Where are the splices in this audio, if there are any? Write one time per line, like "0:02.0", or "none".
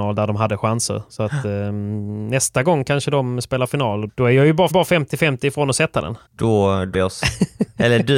0:04.1
0:04.7
0:06.3
0:06.9